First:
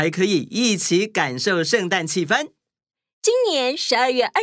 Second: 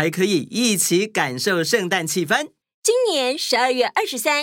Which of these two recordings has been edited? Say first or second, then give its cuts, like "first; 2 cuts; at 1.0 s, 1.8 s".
second; 1 cut; at 2.6 s